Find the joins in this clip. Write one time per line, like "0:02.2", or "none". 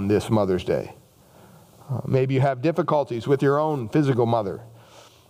none